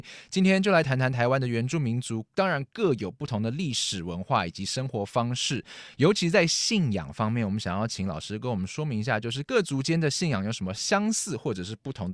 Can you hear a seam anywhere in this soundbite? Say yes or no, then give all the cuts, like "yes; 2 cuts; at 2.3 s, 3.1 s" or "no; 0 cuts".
yes; 1 cut; at 2.3 s